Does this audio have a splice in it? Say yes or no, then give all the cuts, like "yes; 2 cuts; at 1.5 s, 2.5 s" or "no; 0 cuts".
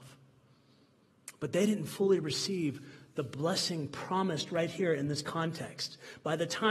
no; 0 cuts